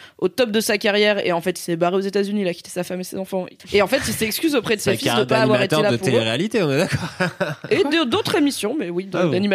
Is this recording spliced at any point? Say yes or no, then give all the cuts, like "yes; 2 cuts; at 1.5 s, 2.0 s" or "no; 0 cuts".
no; 0 cuts